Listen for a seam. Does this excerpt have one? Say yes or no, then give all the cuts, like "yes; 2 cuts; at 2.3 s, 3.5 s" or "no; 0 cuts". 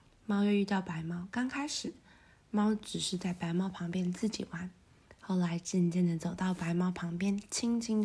no; 0 cuts